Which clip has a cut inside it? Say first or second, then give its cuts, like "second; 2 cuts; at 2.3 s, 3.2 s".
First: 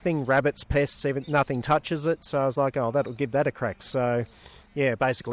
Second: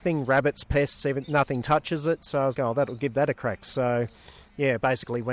second; 1 cut; at 2.5 s